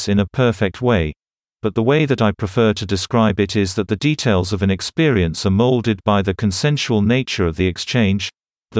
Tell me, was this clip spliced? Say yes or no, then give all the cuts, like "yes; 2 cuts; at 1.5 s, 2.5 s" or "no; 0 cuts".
no; 0 cuts